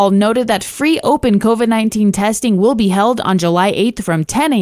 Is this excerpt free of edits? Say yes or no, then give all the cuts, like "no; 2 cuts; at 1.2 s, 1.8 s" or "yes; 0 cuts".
yes; 0 cuts